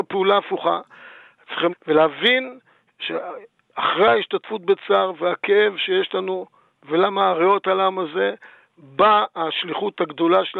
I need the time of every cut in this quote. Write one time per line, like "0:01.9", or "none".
0:01.7

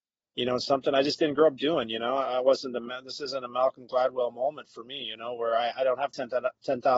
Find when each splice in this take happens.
none

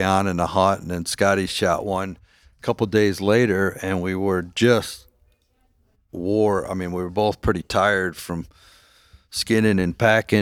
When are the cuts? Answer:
none

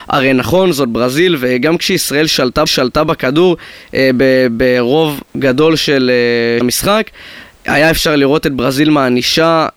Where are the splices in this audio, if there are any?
0:02.7
0:05.3
0:06.6

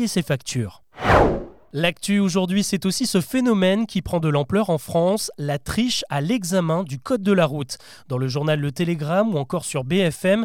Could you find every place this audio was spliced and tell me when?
none

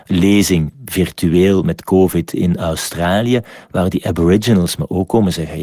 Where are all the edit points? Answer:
none

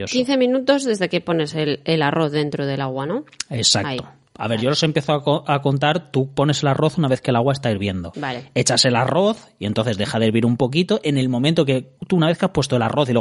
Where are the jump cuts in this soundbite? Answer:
0:12.0

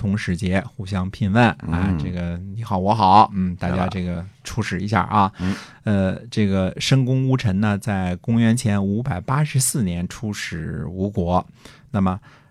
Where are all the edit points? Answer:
0:04.3

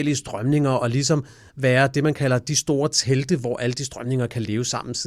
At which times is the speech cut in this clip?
none

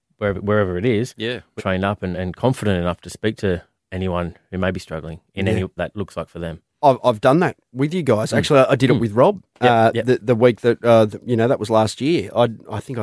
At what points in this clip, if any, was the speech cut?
0:01.6
0:05.8
0:09.5

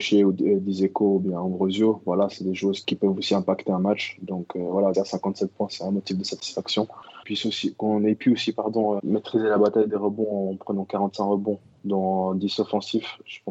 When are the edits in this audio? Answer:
0:04.9
0:07.2
0:09.0

